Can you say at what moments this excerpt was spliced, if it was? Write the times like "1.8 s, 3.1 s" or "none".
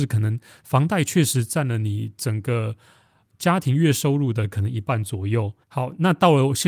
5.6 s